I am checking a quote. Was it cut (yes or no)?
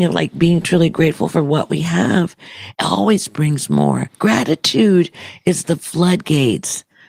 no